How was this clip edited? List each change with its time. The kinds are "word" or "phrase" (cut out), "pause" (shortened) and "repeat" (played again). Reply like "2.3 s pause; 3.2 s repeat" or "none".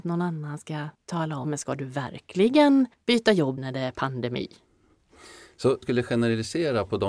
0.9 s pause; 1.4 s word; 2.9 s pause; 3.6 s word; 5.8 s phrase